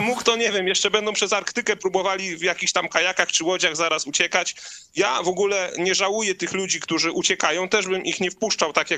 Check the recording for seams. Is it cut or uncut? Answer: uncut